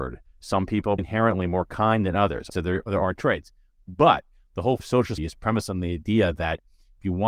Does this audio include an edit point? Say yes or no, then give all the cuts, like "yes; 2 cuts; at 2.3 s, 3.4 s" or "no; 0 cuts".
yes; 4 cuts; at 1.0 s, 2.5 s, 4.8 s, 5.2 s